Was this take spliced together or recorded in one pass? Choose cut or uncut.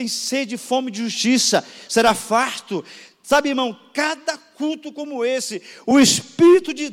uncut